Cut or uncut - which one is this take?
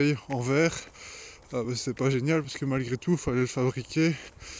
uncut